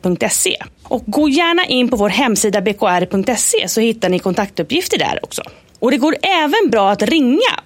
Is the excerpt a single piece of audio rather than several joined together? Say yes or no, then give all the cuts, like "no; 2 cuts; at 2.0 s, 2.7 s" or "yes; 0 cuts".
yes; 0 cuts